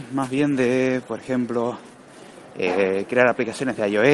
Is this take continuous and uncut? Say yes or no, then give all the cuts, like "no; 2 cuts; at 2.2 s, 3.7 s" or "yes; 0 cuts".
yes; 0 cuts